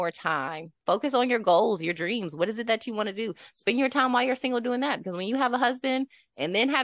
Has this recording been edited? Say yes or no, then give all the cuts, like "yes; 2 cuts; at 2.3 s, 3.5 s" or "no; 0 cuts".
no; 0 cuts